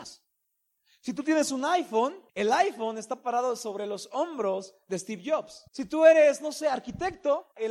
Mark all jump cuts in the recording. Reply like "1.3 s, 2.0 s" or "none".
2.3 s, 5.7 s